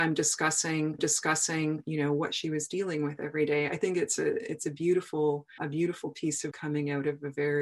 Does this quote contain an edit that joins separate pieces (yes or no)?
yes